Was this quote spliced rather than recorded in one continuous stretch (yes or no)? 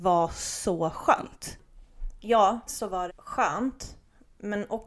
yes